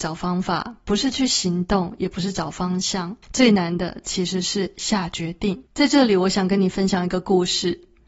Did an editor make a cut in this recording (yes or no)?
yes